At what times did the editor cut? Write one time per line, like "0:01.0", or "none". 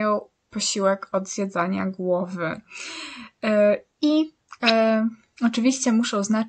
none